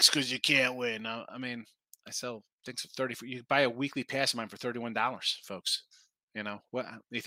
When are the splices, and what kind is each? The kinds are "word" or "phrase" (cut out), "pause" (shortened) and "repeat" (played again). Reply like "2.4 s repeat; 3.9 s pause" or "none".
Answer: 2.5 s pause